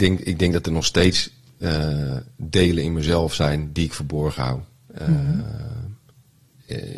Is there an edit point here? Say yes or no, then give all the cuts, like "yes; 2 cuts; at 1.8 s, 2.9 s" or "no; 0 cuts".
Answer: no; 0 cuts